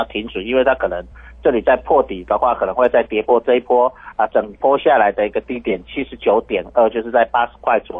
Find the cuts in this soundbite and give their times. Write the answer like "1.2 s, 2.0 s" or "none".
none